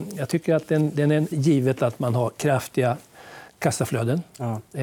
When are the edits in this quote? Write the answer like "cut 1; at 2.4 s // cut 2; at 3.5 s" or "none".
cut 1; at 1.3 s // cut 2; at 3.5 s